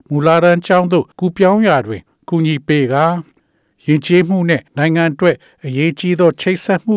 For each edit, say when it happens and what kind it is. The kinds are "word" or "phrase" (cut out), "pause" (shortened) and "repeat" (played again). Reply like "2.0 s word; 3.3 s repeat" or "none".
1.1 s pause; 4.7 s pause

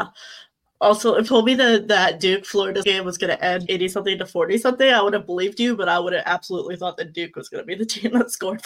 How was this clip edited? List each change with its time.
1.3 s word; 2.8 s word; 3.7 s word

